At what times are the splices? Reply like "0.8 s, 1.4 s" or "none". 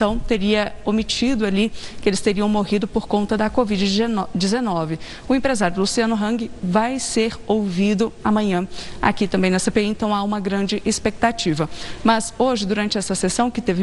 none